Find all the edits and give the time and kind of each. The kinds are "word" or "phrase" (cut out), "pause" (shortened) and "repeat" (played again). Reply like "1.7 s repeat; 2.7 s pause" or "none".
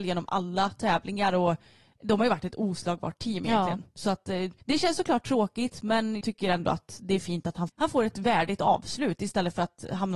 4.6 s pause; 6.2 s word; 7.7 s phrase